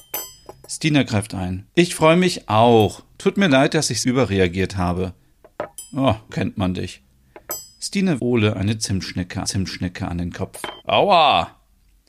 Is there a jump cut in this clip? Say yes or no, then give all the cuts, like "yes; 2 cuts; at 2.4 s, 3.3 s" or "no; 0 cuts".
yes; 6 cuts; at 1.7 s, 4.0 s, 6.3 s, 8.2 s, 9.4 s, 10.8 s